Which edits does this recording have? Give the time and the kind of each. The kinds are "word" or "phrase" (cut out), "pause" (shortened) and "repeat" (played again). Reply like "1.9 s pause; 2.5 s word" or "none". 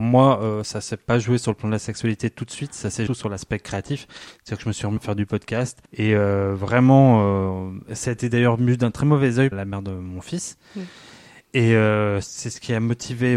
3.1 s phrase; 5.0 s phrase; 5.9 s pause; 9.5 s word